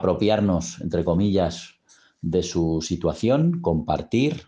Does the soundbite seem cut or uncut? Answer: uncut